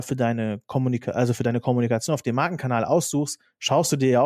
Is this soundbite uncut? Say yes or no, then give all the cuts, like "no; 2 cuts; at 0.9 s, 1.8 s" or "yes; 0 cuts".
yes; 0 cuts